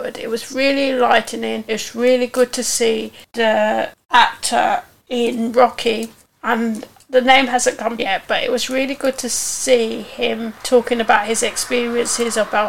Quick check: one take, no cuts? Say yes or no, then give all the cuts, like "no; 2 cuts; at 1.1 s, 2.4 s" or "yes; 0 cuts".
no; 1 cut; at 8.0 s